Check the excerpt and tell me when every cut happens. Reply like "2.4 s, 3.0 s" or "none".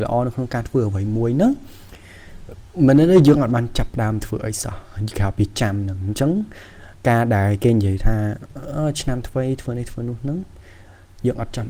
none